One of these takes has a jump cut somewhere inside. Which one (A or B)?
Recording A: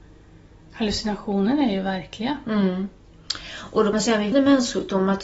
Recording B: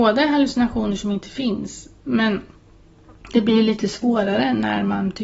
A